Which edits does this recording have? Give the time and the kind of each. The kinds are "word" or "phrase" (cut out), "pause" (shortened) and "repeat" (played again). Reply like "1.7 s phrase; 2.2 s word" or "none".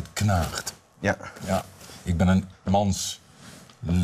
2.5 s word